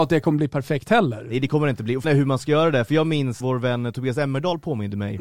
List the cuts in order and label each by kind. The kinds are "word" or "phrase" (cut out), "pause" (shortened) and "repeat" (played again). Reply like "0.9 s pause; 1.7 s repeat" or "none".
2.0 s word; 3.4 s word

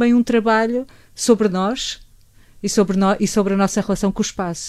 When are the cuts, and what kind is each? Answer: none

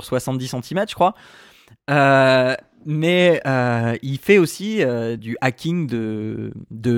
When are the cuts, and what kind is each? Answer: 5.2 s word

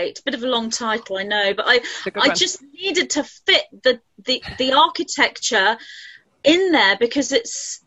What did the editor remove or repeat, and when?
none

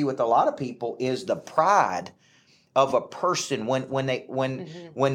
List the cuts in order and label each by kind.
none

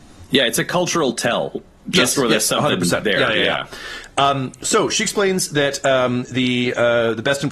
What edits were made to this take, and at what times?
none

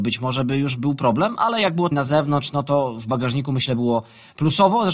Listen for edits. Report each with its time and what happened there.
1.9 s phrase

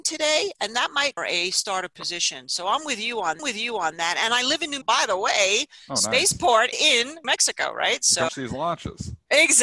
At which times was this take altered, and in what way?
1.2 s phrase; 3.4 s repeat; 4.8 s word; 6.7 s word; 7.2 s word; 8.3 s word

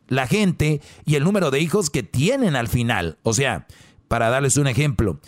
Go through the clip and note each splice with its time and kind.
none

